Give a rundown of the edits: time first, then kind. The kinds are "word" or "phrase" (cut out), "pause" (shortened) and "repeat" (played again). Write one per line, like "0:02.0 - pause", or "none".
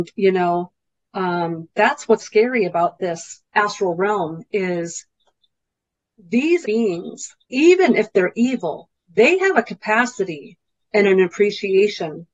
0:01.7 - pause
0:02.2 - word
0:03.5 - pause
0:06.6 - word
0:07.4 - pause
0:09.0 - pause